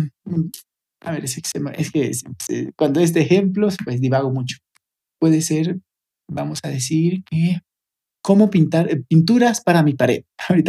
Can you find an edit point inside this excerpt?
no; 0 cuts

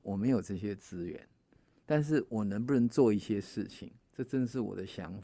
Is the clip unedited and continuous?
yes; 0 cuts

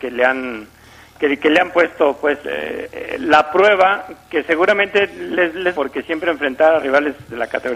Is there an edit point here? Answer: yes; 2 cuts; at 2.4 s, 5.7 s

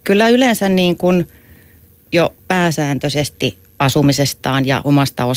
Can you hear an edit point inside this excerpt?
yes; 2 cuts; at 2.0 s, 2.4 s

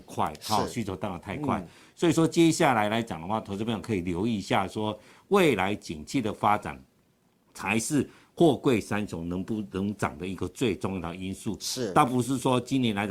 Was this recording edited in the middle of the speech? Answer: no; 0 cuts

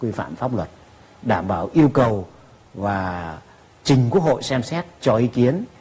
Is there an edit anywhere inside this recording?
no; 0 cuts

